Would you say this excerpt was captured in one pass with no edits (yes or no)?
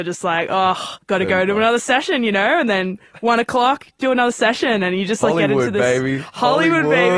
no